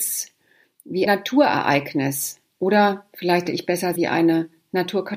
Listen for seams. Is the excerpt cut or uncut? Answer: cut